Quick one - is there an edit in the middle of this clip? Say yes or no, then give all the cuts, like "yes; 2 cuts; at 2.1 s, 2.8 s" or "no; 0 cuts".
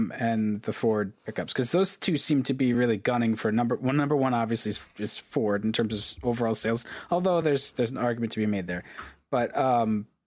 no; 0 cuts